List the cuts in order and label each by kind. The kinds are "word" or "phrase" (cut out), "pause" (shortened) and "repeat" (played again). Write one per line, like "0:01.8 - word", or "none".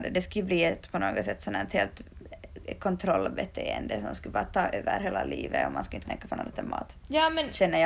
0:06.0 - word